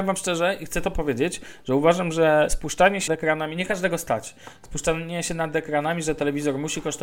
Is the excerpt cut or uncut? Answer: cut